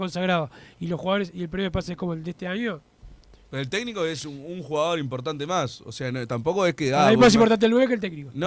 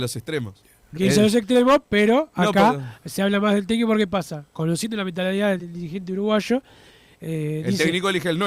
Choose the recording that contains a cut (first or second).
second